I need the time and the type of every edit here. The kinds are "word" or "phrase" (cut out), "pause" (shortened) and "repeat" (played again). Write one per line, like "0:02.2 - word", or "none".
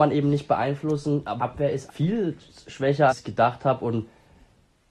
0:01.4 - word
0:01.9 - word
0:03.1 - word

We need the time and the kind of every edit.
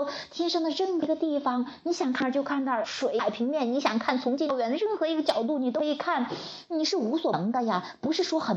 0:02.8 - word

